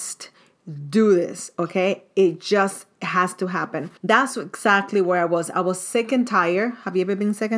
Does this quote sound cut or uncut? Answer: cut